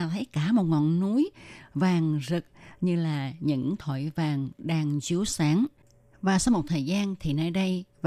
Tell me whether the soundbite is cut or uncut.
uncut